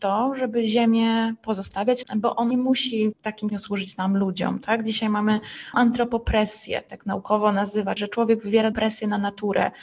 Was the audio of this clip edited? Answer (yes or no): yes